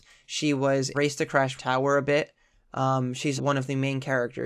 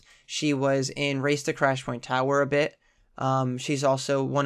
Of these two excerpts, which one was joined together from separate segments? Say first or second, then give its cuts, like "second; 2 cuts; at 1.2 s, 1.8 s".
first; 3 cuts; at 0.9 s, 1.6 s, 3.4 s